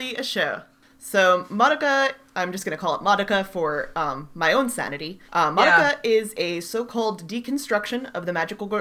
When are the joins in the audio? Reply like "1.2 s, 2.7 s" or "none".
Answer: 5.3 s